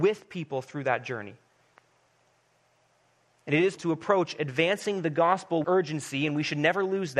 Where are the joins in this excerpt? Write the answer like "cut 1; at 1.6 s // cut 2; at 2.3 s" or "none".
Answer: cut 1; at 3.8 s // cut 2; at 5.6 s